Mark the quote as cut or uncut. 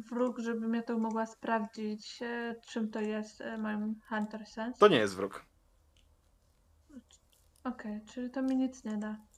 uncut